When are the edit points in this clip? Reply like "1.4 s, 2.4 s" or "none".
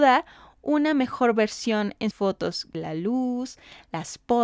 2.1 s, 2.7 s